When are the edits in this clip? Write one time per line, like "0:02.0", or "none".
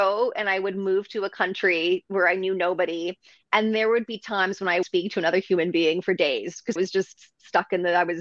0:04.8
0:06.8